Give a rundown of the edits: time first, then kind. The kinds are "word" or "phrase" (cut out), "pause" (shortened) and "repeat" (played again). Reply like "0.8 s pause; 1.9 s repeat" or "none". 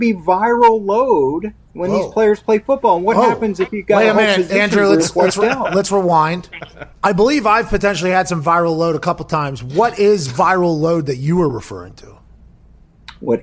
1.6 s pause; 6.9 s pause